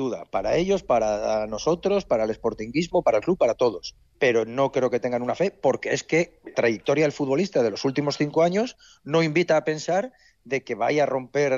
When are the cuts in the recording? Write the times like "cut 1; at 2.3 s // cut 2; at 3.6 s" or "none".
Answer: cut 1; at 4.1 s // cut 2; at 6.5 s